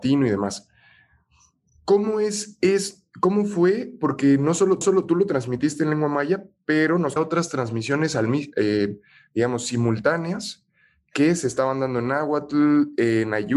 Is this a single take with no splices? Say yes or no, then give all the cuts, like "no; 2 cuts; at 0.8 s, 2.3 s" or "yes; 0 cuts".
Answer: no; 2 cuts; at 4.8 s, 7.2 s